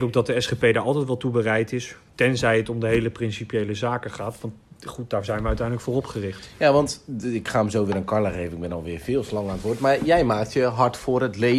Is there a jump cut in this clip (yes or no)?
no